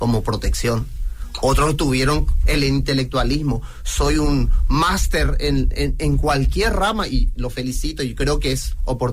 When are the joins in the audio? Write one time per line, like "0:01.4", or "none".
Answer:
none